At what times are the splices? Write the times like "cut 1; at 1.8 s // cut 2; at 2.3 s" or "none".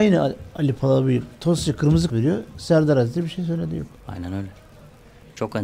cut 1; at 2.1 s // cut 2; at 4.0 s